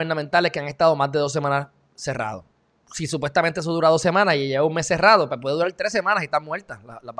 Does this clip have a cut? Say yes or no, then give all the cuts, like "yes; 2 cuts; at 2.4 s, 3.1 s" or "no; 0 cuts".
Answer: no; 0 cuts